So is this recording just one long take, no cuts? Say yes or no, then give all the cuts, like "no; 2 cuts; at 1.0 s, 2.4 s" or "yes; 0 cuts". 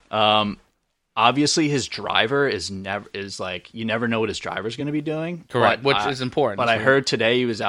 yes; 0 cuts